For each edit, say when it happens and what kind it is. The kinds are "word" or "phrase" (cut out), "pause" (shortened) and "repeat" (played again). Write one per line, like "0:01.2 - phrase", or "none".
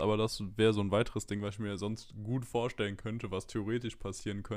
none

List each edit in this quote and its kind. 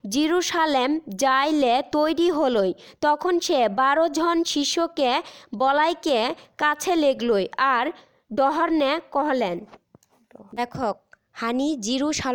none

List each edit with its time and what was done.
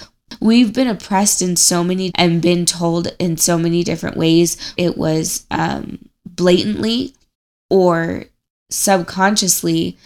0:02.1 - phrase
0:04.8 - word
0:07.3 - pause

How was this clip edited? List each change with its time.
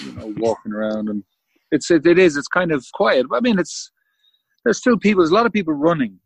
0:02.9 - phrase

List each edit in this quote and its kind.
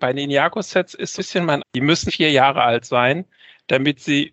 0:01.2 - word
0:01.6 - word
0:02.1 - word

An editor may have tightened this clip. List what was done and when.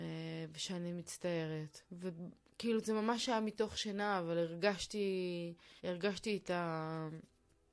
0:01.9 - pause
0:05.8 - pause

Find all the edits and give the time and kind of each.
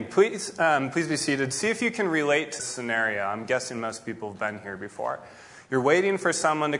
0:02.6 - word

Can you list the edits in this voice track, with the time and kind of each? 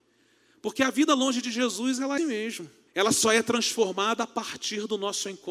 0:02.2 - word
0:02.9 - pause

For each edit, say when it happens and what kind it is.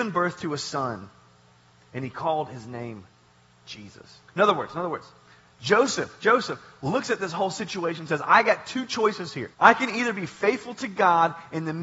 0:04.3 - pause
0:09.5 - pause

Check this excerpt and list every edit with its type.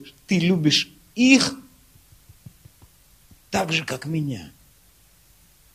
0:03.4 - pause

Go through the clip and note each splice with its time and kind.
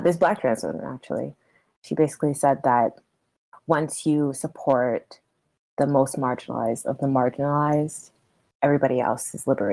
none

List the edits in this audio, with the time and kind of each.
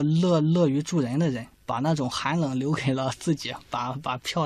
0:01.5 - pause

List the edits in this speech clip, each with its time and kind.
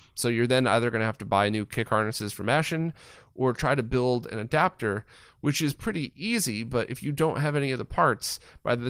none

